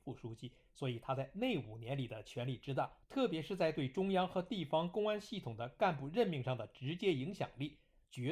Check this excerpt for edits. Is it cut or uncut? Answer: cut